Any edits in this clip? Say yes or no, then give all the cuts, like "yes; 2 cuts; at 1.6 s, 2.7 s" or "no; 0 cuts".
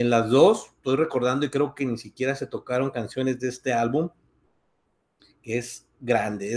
no; 0 cuts